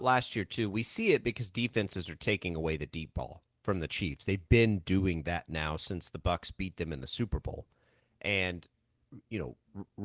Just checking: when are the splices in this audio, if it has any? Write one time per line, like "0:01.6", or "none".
none